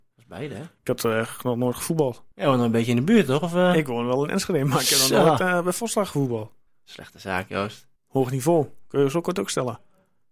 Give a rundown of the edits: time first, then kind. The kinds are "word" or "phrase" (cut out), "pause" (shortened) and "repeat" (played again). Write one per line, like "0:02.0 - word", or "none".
0:06.7 - pause
0:08.0 - pause